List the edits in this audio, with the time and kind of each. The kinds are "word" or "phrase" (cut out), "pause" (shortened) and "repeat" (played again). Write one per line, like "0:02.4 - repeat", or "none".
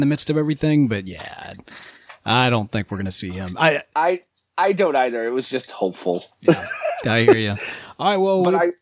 none